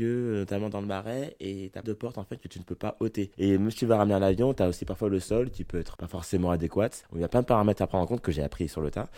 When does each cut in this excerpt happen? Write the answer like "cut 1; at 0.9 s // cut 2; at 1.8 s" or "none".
cut 1; at 1.8 s // cut 2; at 3.3 s // cut 3; at 6.0 s // cut 4; at 7.0 s